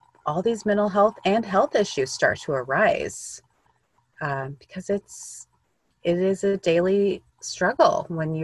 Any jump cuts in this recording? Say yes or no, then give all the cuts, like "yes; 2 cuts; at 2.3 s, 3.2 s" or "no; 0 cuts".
no; 0 cuts